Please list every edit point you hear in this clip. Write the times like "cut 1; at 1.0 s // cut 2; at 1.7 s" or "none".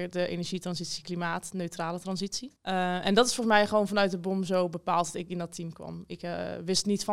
cut 1; at 2.6 s